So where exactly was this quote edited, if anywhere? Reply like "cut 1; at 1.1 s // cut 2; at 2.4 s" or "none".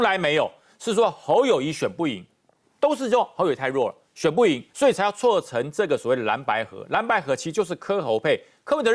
cut 1; at 4.7 s